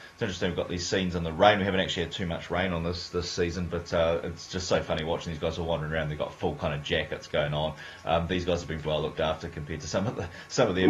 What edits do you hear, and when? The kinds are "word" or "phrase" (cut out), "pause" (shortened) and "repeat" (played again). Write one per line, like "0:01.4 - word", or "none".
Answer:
0:08.8 - word